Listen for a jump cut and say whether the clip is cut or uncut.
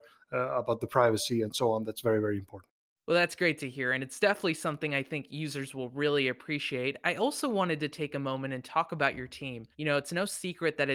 cut